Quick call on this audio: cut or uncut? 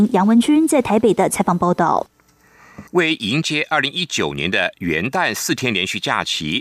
cut